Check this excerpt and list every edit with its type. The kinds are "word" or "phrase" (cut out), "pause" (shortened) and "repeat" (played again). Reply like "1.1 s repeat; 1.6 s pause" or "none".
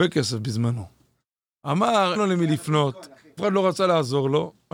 2.1 s word; 3.4 s word